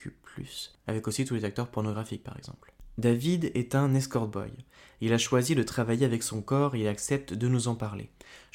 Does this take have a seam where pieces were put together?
no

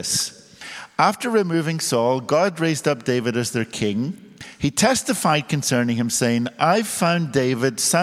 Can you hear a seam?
no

